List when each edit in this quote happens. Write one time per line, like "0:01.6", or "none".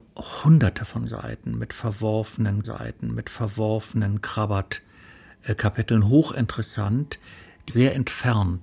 0:02.6
0:07.7